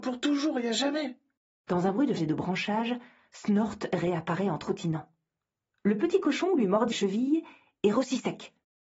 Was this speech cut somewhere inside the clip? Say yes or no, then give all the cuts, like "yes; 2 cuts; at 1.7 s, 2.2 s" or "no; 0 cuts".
yes; 3 cuts; at 2.2 s, 6.9 s, 7.9 s